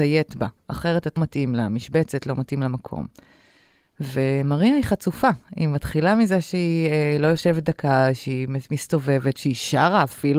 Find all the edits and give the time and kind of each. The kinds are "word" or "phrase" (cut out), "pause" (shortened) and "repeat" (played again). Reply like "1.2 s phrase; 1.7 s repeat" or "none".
1.2 s word